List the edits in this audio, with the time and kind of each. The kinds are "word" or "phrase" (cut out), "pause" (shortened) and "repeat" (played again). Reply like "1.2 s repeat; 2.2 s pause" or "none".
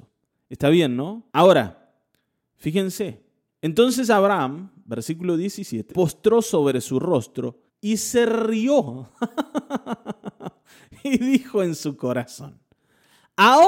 1.3 s pause; 3.5 s pause; 5.9 s word; 7.7 s pause